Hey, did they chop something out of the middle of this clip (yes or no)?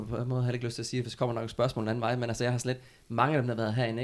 no